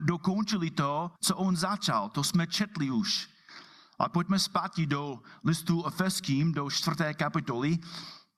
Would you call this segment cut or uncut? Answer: cut